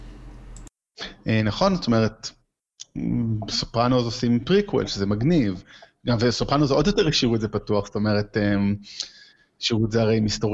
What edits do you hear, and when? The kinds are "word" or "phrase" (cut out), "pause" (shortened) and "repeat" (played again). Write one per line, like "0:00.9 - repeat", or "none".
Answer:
none